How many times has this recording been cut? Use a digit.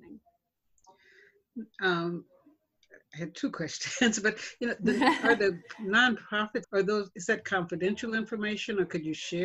1